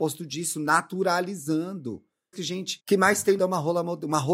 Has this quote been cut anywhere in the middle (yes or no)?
yes